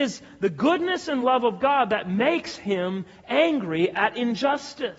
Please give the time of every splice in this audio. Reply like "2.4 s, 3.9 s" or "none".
none